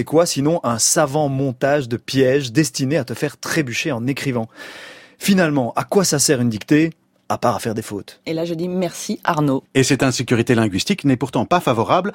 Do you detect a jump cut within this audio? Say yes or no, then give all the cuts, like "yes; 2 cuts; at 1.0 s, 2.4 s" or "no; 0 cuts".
no; 0 cuts